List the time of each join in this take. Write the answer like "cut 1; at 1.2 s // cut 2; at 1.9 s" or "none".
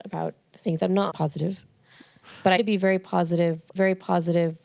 cut 1; at 1.1 s // cut 2; at 2.6 s // cut 3; at 3.8 s